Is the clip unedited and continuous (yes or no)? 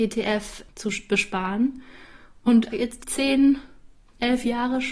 no